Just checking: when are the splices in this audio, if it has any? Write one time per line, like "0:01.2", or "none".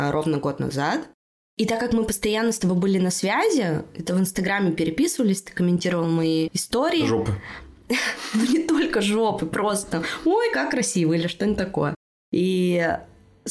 none